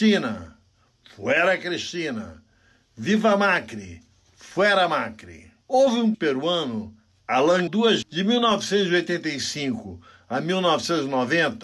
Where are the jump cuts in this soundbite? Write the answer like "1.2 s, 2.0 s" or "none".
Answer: 5.6 s, 6.1 s, 7.7 s, 8.0 s